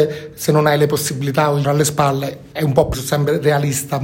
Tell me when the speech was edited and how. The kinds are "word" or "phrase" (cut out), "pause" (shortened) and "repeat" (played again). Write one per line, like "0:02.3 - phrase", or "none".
0:01.6 - word
0:02.5 - word
0:02.9 - word